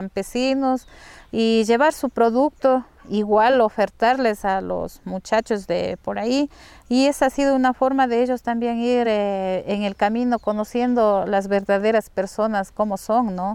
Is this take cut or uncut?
uncut